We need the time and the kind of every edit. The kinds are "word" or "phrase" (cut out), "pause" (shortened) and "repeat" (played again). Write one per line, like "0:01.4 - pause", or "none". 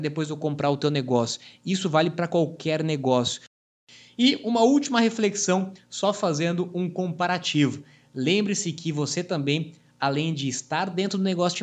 none